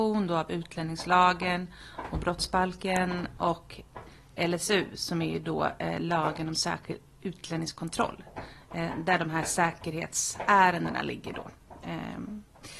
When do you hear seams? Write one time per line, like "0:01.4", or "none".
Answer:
none